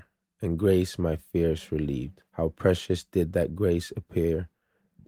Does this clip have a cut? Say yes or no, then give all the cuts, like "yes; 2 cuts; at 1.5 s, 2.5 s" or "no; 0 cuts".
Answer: yes; 1 cut; at 2.3 s